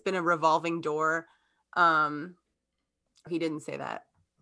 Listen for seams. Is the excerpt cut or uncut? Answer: cut